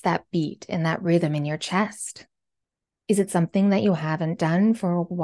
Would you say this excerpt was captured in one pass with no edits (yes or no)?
yes